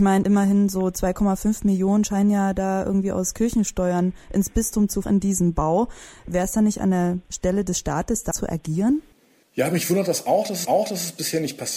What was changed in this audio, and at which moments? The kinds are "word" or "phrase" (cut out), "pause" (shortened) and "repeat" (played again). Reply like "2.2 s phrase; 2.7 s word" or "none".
5.0 s phrase; 8.3 s word; 10.6 s repeat